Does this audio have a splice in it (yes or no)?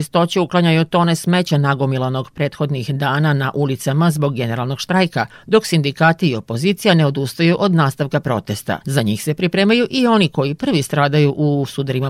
yes